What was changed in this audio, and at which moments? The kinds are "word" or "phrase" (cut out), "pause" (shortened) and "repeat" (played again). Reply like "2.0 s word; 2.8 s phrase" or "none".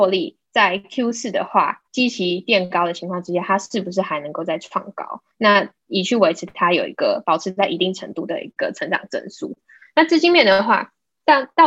1.9 s pause; 5.3 s pause